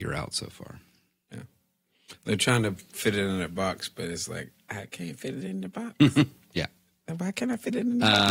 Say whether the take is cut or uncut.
uncut